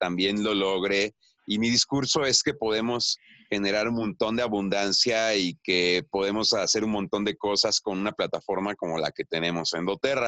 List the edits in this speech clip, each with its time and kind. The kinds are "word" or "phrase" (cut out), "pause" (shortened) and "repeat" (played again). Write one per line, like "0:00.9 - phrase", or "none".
none